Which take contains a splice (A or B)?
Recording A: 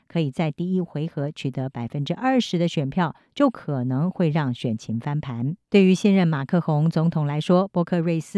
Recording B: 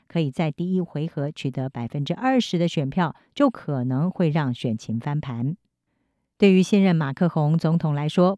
A